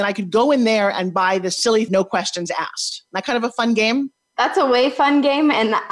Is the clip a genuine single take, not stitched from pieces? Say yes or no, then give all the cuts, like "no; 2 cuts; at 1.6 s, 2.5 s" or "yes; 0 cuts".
no; 1 cut; at 1.9 s